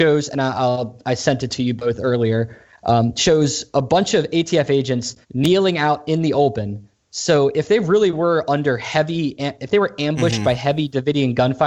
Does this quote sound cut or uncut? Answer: cut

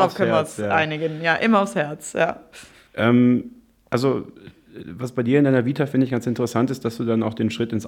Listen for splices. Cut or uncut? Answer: uncut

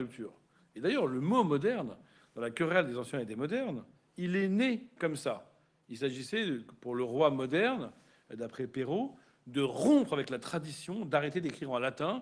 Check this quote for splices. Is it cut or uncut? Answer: uncut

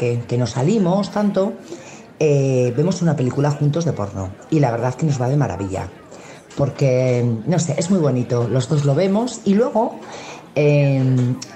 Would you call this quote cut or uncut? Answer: uncut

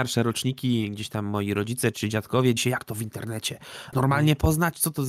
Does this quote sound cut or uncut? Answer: cut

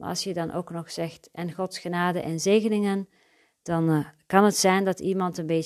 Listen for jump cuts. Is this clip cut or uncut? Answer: uncut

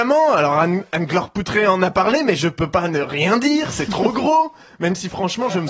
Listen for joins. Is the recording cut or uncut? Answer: uncut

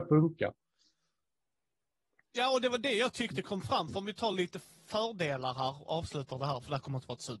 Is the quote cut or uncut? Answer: uncut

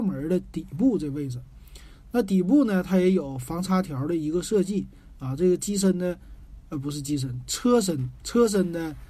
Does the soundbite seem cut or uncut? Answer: uncut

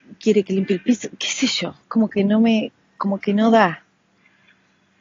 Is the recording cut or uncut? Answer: cut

